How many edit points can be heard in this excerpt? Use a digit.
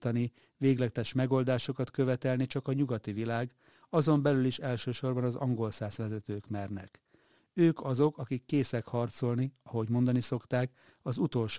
0